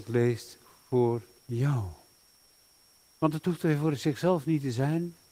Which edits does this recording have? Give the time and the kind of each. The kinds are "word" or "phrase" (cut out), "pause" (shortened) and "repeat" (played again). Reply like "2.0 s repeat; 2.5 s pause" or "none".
none